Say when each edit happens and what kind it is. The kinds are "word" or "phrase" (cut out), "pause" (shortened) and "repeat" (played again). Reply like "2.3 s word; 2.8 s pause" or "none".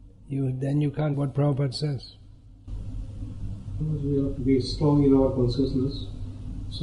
1.1 s word; 3.8 s word; 4.4 s word